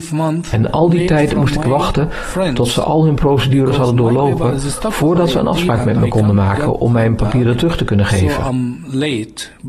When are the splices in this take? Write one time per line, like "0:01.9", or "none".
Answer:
none